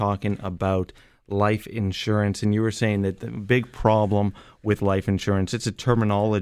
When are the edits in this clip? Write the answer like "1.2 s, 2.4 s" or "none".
none